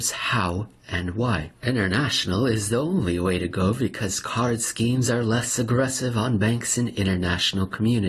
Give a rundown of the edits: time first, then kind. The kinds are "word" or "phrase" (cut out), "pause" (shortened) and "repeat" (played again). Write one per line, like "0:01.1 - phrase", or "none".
0:01.5 - pause